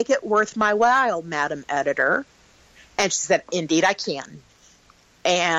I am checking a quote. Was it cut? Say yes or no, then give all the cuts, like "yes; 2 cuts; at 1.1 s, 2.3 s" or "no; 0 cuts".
no; 0 cuts